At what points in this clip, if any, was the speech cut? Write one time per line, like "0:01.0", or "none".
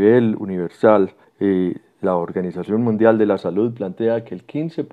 0:01.2